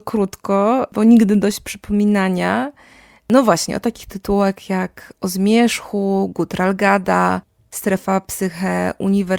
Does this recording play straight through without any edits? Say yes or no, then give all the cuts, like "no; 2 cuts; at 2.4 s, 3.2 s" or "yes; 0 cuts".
yes; 0 cuts